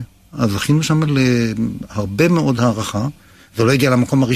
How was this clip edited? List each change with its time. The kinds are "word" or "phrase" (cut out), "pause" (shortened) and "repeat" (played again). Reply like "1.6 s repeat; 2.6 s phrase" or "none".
none